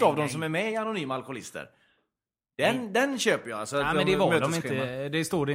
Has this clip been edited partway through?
no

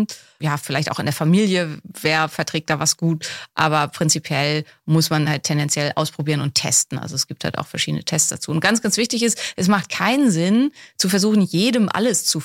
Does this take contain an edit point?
no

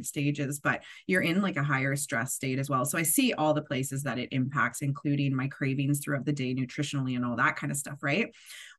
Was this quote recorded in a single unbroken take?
yes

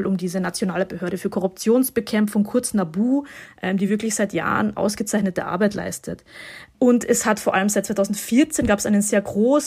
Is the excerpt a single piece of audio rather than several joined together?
yes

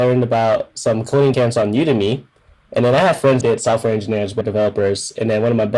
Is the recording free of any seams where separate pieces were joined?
no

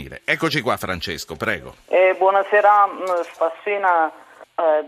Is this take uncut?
no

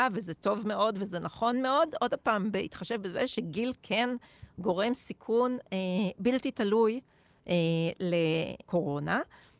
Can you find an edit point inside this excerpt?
no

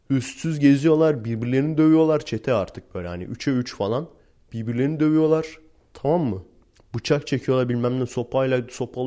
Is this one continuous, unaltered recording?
yes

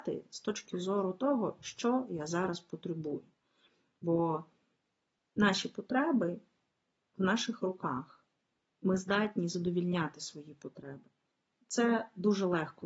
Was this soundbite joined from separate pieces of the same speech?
no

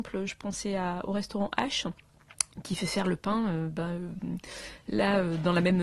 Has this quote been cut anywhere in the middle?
no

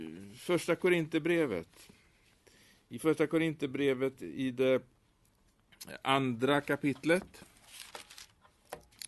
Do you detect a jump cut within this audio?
no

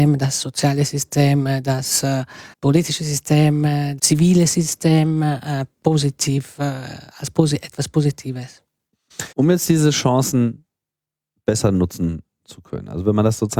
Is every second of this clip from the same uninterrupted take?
no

